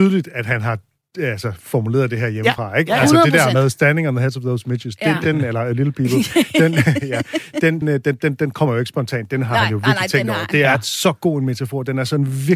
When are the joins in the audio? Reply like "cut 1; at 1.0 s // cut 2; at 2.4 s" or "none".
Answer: cut 1; at 5.2 s // cut 2; at 7.8 s